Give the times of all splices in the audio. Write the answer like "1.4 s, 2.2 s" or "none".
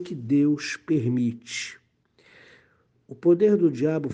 none